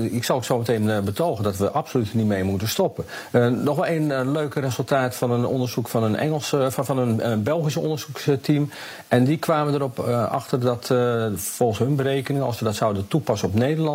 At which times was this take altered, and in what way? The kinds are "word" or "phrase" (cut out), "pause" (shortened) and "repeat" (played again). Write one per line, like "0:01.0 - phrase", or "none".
none